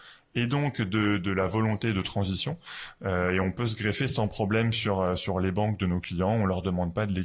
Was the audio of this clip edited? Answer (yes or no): no